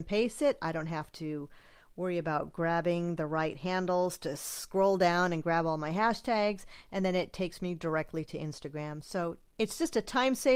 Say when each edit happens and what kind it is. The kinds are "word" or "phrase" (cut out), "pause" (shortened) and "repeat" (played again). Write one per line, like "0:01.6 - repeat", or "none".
none